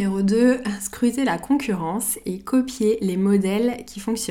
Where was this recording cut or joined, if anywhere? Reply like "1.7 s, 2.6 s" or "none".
none